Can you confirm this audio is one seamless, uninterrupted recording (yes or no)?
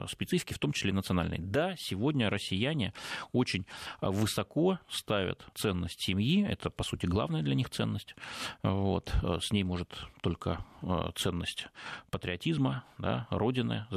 no